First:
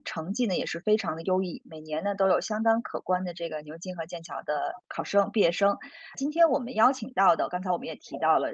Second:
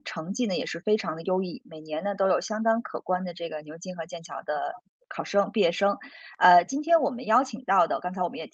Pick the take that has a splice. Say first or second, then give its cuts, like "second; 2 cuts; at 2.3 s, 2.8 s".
first; 2 cuts; at 4.8 s, 6.1 s